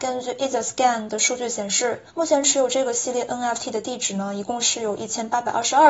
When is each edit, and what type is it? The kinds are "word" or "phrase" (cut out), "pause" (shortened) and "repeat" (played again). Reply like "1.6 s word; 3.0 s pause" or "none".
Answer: 2.1 s pause